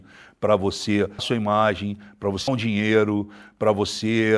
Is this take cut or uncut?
cut